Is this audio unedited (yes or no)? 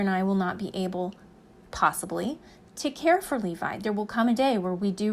yes